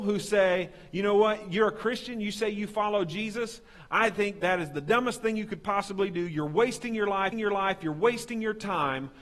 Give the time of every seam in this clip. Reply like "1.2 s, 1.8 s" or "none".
4.4 s, 7.3 s